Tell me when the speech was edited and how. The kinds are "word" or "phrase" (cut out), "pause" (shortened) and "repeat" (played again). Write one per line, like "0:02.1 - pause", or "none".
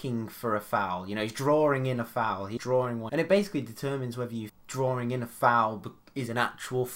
0:02.6 - word
0:03.1 - word
0:04.5 - word